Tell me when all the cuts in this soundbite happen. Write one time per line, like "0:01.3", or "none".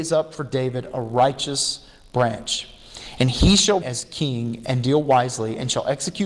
0:03.8